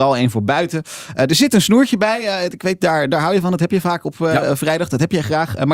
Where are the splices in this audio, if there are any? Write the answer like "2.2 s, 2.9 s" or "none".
none